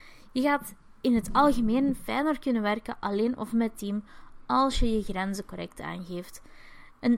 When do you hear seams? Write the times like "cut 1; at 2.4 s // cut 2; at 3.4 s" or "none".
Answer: none